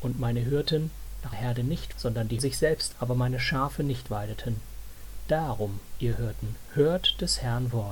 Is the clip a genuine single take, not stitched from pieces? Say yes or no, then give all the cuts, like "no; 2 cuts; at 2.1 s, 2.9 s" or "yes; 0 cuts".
no; 4 cuts; at 1.3 s, 1.9 s, 2.4 s, 2.9 s